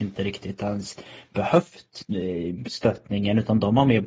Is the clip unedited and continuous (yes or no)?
yes